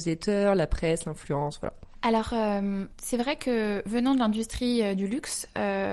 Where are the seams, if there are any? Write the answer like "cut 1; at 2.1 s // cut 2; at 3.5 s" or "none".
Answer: cut 1; at 2.9 s